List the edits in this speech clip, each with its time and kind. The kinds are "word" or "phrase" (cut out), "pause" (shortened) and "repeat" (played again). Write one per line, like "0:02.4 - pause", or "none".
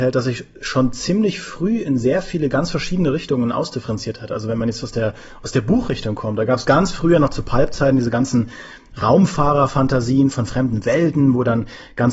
none